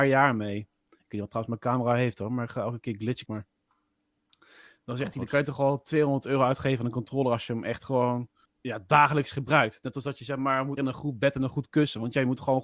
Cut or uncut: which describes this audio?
cut